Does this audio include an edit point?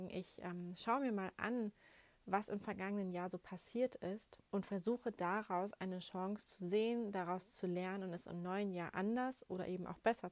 yes; 1 cut; at 4.5 s

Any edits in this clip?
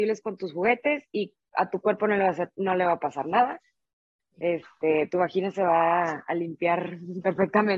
no; 0 cuts

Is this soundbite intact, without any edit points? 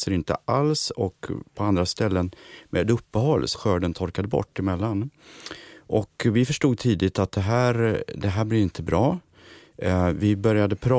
no; 1 cut; at 3.5 s

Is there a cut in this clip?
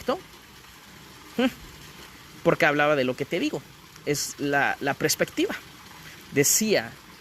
no; 0 cuts

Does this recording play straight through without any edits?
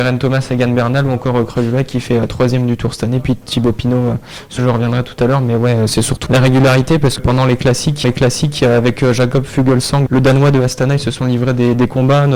no; 5 cuts; at 4.6 s, 6.3 s, 7.2 s, 8.0 s, 10.1 s

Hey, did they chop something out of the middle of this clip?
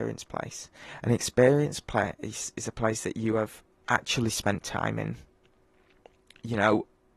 no; 0 cuts

